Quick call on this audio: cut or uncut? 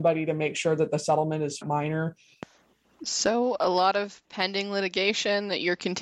cut